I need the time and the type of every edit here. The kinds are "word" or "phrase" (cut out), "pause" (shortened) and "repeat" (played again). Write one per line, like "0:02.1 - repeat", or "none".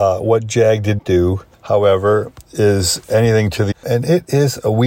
0:01.0 - word
0:03.7 - word